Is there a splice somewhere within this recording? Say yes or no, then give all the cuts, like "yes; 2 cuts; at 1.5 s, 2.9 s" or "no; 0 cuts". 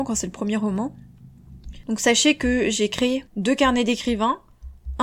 no; 0 cuts